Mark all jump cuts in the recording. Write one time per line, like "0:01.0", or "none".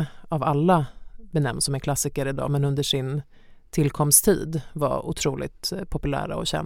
none